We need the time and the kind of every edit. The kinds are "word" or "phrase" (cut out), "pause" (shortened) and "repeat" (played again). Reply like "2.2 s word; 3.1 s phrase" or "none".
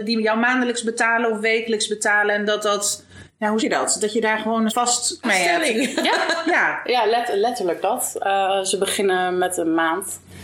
3.6 s word; 4.7 s word; 5.2 s word